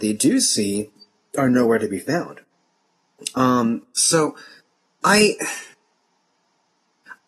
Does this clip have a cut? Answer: no; 0 cuts

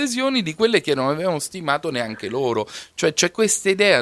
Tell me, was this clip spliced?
no; 0 cuts

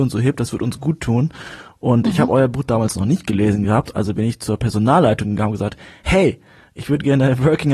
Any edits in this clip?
no; 0 cuts

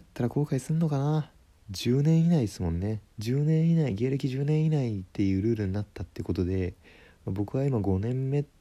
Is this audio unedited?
no; 3 cuts; at 1.6 s, 3.1 s, 5.1 s

